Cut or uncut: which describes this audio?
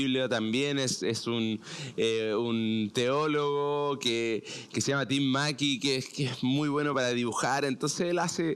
uncut